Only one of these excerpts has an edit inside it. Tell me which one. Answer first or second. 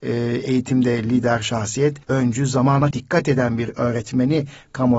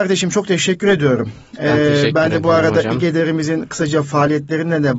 first